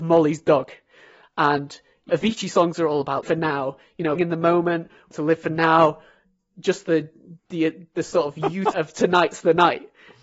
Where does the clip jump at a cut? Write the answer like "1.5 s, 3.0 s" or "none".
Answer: 2.1 s, 3.2 s, 4.1 s, 5.1 s, 7.4 s, 8.7 s